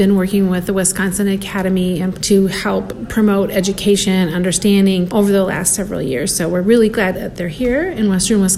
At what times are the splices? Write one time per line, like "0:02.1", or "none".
0:02.1
0:05.1